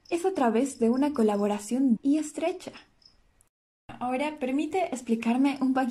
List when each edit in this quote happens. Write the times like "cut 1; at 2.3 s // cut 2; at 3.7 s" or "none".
cut 1; at 1.9 s